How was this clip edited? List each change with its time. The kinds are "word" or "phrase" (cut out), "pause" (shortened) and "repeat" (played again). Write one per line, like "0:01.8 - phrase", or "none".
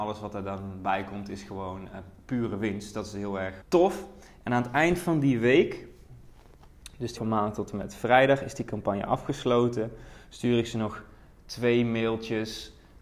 0:03.6 - word
0:07.2 - word